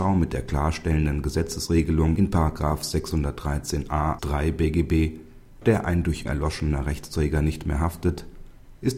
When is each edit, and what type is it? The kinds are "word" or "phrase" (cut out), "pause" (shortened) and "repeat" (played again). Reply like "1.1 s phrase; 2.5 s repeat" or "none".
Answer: 4.2 s word; 5.6 s word; 6.3 s word